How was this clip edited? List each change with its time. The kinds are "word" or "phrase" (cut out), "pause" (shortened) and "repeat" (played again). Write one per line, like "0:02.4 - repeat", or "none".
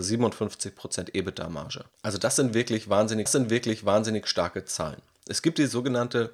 0:01.9 - pause
0:03.3 - repeat